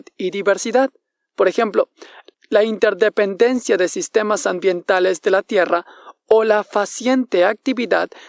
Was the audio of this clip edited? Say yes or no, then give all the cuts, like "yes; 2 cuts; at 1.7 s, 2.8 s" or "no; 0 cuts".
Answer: no; 0 cuts